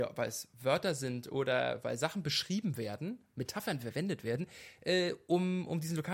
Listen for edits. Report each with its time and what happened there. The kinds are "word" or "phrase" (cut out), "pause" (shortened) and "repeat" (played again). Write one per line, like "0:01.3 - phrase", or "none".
none